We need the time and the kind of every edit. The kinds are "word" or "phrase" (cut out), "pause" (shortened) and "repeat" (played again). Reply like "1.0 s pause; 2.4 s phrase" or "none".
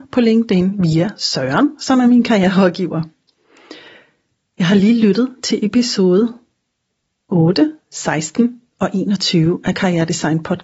none